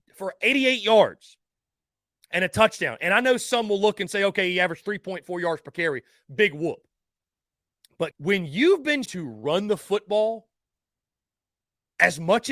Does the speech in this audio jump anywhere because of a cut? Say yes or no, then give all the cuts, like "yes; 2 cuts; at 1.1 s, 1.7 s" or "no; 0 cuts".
yes; 2 cuts; at 8.1 s, 9.0 s